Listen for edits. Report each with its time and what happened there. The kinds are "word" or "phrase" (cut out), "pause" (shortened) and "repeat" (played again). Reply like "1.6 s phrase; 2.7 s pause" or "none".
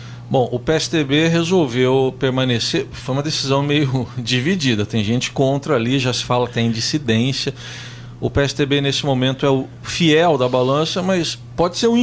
none

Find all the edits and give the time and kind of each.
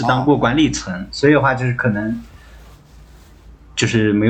none

